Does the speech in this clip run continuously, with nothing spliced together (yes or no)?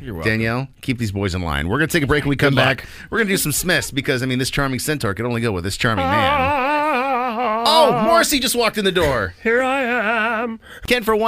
yes